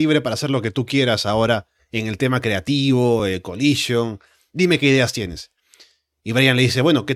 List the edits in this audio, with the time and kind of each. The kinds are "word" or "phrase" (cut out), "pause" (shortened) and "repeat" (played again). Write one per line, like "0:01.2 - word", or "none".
none